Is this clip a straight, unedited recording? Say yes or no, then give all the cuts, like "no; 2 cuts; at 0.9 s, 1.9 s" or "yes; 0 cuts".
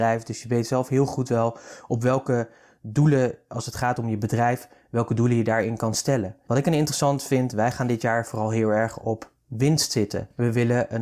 yes; 0 cuts